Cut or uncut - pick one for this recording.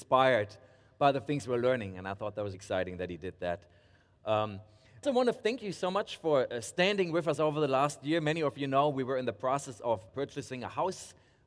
cut